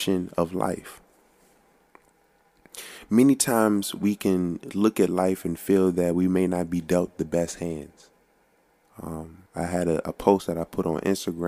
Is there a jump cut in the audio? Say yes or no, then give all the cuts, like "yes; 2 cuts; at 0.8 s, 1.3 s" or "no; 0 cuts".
yes; 1 cut; at 9.4 s